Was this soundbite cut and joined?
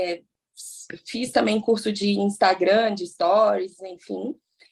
no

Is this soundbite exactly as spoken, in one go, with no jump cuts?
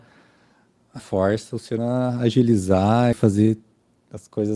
no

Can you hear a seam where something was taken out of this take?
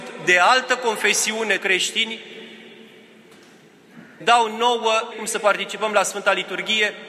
yes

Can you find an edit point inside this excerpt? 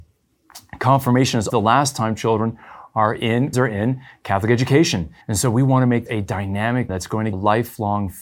yes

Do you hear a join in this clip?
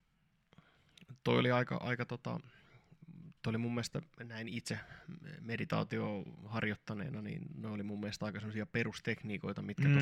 yes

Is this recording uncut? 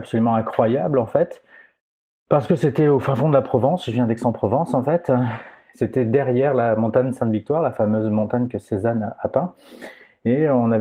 yes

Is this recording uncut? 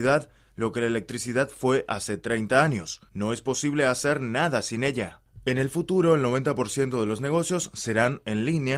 no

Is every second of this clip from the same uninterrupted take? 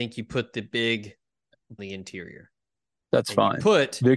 no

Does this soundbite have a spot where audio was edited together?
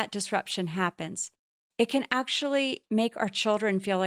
no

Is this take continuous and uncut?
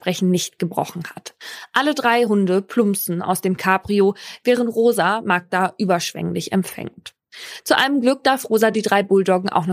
yes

